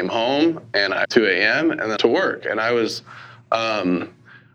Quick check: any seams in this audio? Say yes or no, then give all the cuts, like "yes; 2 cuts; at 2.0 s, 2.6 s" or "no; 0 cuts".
yes; 2 cuts; at 1.0 s, 2.0 s